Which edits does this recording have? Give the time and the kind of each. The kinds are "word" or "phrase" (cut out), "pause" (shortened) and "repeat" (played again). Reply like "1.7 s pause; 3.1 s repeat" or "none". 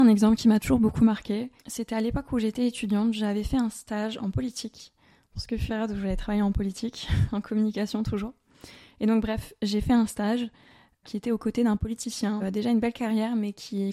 1.6 s pause; 5.7 s word; 11.0 s word; 12.4 s phrase